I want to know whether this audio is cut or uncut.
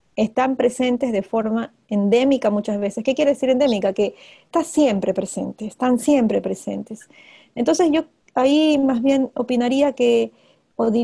uncut